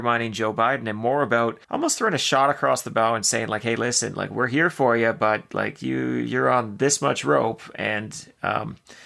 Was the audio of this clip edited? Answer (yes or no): yes